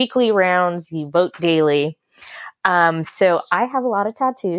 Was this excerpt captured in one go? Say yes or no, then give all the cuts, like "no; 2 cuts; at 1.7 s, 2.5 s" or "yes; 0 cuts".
yes; 0 cuts